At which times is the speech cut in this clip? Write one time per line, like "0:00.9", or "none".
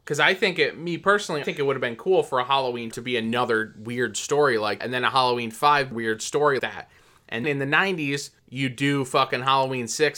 0:01.4
0:02.9
0:04.8
0:05.9
0:06.6
0:07.4
0:08.4